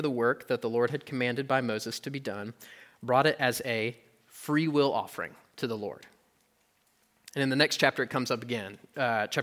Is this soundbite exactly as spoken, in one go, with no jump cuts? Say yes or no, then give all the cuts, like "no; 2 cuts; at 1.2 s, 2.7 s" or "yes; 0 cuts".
yes; 0 cuts